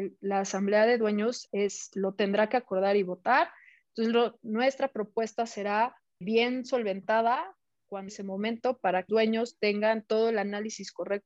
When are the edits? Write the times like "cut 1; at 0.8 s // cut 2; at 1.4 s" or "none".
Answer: cut 1; at 1.5 s // cut 2; at 6.2 s // cut 3; at 8.1 s // cut 4; at 9.1 s